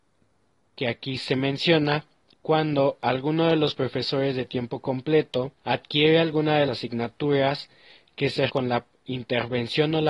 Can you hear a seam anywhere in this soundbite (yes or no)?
yes